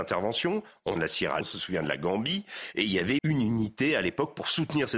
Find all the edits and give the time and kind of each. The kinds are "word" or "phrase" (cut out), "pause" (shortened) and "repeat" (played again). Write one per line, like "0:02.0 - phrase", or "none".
0:01.0 - phrase
0:01.4 - word
0:03.2 - word